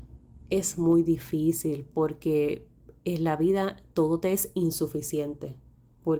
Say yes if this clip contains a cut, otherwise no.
no